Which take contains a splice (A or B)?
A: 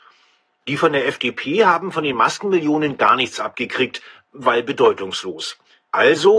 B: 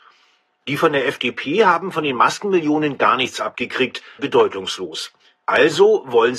B